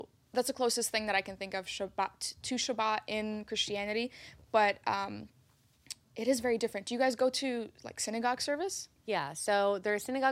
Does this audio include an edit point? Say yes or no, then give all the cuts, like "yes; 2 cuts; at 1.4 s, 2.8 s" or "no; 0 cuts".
no; 0 cuts